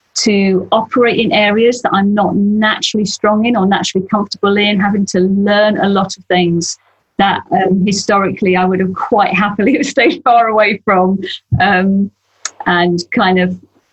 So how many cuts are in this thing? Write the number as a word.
zero